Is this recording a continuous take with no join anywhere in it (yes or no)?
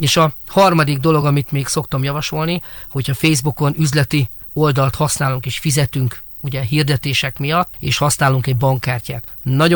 yes